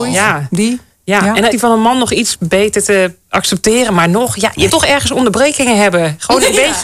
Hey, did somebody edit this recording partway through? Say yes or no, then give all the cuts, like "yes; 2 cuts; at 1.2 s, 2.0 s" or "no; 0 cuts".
yes; 2 cuts; at 1.5 s, 4.7 s